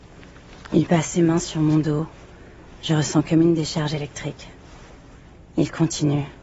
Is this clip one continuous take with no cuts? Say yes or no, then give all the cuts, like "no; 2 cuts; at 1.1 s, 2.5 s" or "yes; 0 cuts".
yes; 0 cuts